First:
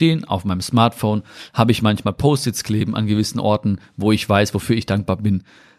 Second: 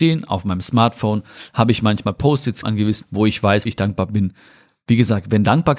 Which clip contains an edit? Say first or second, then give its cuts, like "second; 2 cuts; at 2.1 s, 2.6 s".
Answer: second; 3 cuts; at 2.6 s, 3.0 s, 3.7 s